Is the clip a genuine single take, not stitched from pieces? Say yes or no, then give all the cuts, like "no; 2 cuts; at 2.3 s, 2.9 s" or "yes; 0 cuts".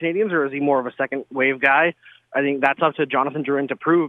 yes; 0 cuts